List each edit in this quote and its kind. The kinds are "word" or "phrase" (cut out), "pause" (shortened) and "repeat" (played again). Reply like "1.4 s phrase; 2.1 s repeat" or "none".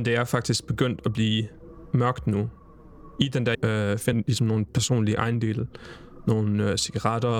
3.5 s word; 4.1 s word